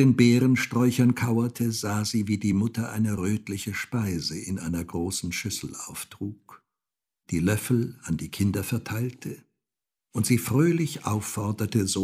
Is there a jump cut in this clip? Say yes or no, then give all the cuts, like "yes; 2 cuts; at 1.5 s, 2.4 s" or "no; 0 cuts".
no; 0 cuts